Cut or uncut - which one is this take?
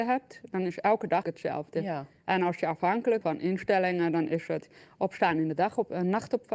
cut